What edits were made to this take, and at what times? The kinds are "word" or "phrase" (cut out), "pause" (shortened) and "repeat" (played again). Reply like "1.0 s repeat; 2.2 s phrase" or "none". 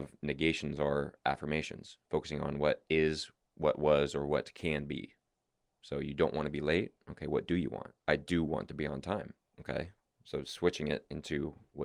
8.0 s pause; 9.5 s pause